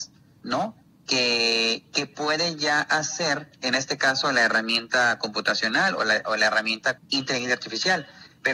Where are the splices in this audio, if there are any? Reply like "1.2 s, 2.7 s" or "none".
7.0 s

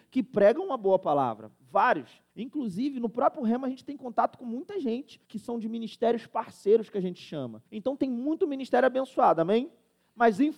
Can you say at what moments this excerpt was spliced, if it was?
2.3 s, 5.2 s, 7.7 s

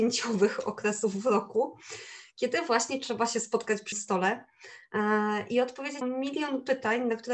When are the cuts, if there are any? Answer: 3.9 s, 6.0 s

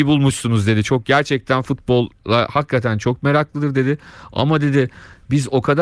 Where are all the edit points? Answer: 2.2 s

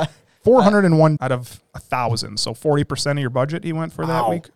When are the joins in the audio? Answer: 1.2 s

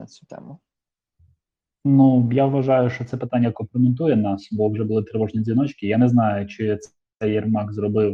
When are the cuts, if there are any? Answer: none

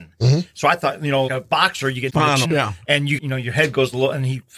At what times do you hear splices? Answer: 1.3 s, 2.1 s, 2.4 s, 3.2 s

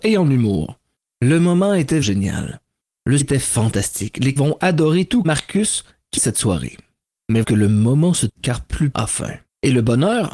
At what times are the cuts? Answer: 2.0 s, 3.2 s, 4.4 s, 5.2 s, 6.2 s, 7.4 s, 8.3 s, 8.9 s

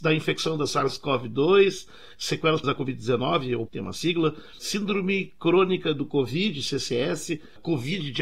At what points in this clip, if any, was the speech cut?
2.6 s, 3.7 s

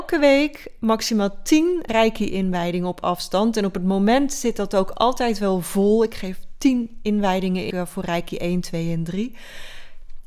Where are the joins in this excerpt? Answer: 1.9 s, 7.7 s

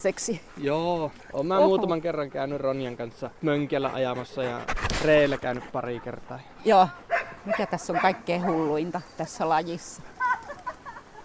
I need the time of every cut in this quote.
3.4 s, 9.1 s

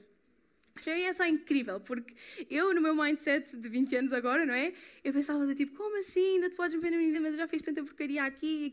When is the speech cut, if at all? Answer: 7.1 s

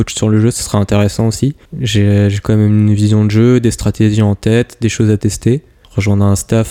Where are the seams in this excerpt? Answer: 1.6 s

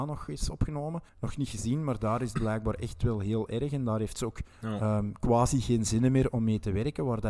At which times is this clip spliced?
1.1 s, 4.5 s

